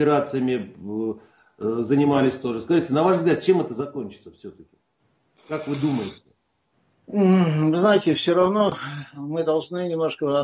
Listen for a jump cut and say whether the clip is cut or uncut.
uncut